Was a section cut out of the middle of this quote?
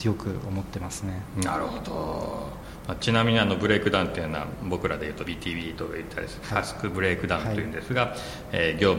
yes; 1 cut; at 5.3 s

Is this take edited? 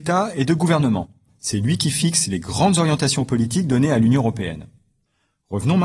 no; 0 cuts

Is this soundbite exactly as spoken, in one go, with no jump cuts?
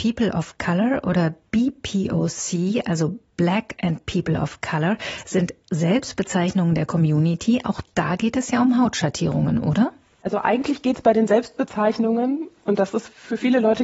yes; 0 cuts

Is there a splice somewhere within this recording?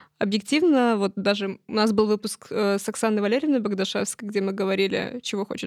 no; 0 cuts

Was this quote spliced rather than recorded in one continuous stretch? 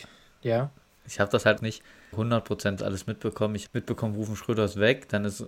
yes; 4 cuts; at 1.6 s, 2.1 s, 2.8 s, 3.7 s

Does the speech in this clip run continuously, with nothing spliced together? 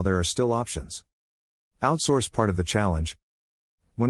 yes; 0 cuts

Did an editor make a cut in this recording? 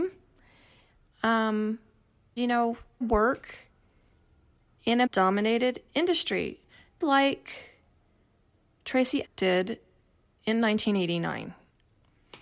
yes; 5 cuts; at 2.4 s, 3.0 s, 5.1 s, 7.0 s, 9.2 s

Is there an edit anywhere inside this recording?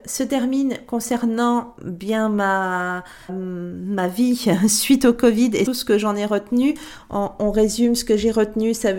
yes; 3 cuts; at 1.8 s, 3.3 s, 5.7 s

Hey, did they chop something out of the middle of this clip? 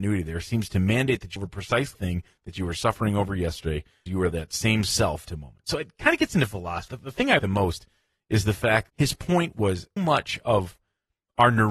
yes; 8 cuts; at 1.4 s, 1.9 s, 4.1 s, 5.2 s, 6.9 s, 7.4 s, 8.9 s, 10.0 s

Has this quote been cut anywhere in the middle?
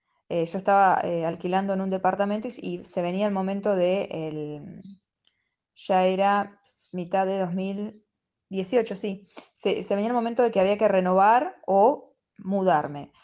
no; 0 cuts

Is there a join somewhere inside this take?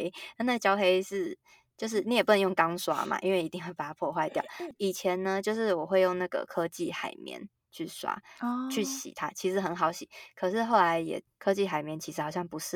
no; 0 cuts

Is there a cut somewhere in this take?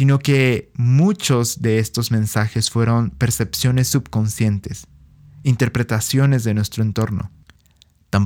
no; 0 cuts

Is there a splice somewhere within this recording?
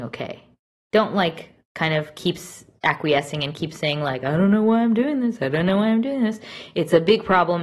no; 0 cuts

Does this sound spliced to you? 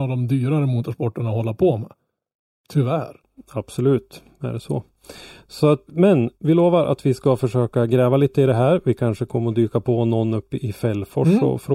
yes; 3 cuts; at 3.4 s, 5.9 s, 6.3 s

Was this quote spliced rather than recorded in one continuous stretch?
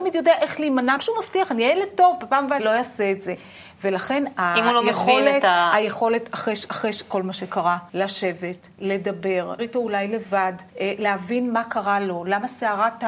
yes; 6 cuts; at 1.0 s, 2.6 s, 6.7 s, 7.9 s, 9.6 s, 10.7 s

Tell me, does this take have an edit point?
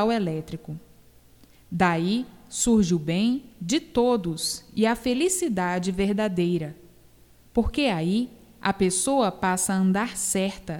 no; 0 cuts

